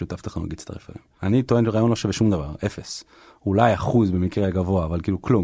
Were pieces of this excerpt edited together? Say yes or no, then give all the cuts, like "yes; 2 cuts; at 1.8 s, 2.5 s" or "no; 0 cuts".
no; 0 cuts